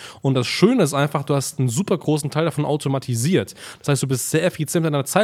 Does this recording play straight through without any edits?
yes; 0 cuts

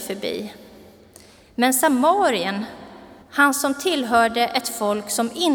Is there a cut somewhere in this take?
yes; 1 cut; at 3.2 s

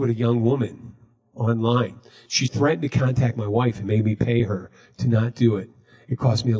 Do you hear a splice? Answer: no; 0 cuts

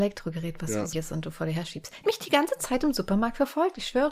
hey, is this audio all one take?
no; 2 cuts; at 0.9 s, 2.0 s

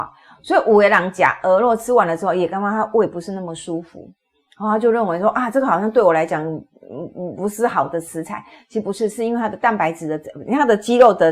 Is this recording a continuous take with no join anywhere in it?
yes; 0 cuts

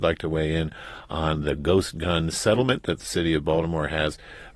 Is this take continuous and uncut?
yes; 0 cuts

